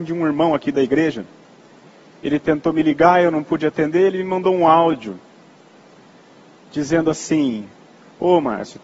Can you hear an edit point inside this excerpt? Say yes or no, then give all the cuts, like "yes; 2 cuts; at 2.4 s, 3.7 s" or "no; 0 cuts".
no; 0 cuts